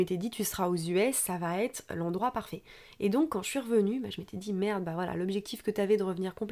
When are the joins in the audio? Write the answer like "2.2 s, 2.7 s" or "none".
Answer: none